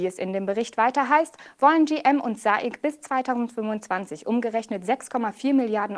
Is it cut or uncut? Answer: uncut